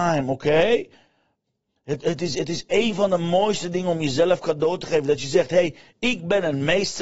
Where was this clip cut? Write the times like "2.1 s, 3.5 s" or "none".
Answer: 2.0 s

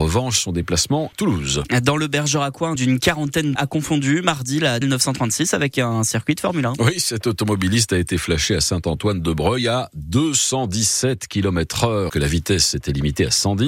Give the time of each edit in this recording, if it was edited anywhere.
1.1 s, 2.8 s, 3.6 s, 4.8 s, 12.1 s

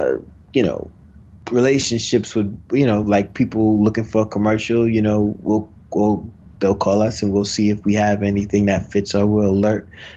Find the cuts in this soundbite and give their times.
none

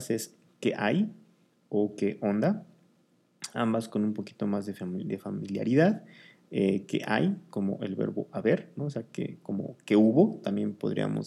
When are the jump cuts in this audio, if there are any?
none

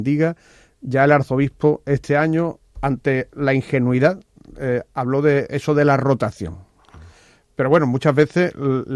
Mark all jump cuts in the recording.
none

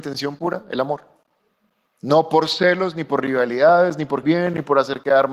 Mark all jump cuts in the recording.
4.2 s

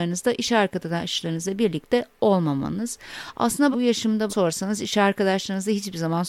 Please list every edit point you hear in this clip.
3.7 s, 4.3 s

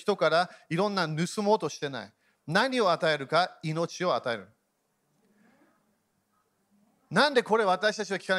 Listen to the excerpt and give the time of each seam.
none

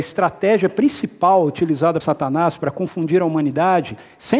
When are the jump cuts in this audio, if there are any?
2.0 s

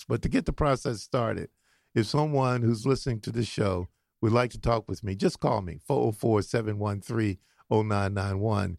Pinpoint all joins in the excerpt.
none

